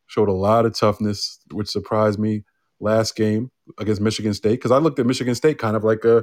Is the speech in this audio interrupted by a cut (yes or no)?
yes